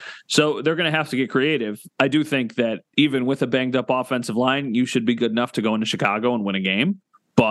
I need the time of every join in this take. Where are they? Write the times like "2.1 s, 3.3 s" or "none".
none